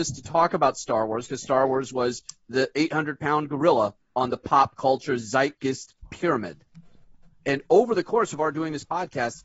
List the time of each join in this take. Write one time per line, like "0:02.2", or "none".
none